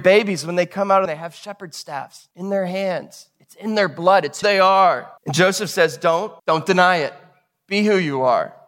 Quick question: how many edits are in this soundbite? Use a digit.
5